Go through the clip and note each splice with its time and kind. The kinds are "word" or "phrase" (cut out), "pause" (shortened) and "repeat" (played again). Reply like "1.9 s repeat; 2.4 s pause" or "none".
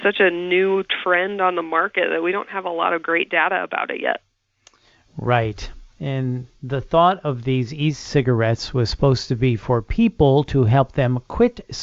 none